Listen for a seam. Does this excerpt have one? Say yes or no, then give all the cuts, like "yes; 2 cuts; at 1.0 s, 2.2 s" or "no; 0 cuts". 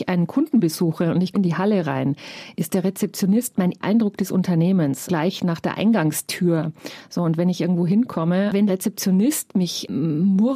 yes; 4 cuts; at 1.3 s, 3.8 s, 5.1 s, 8.7 s